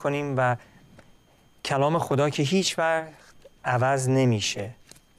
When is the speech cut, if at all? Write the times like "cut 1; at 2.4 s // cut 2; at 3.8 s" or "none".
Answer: none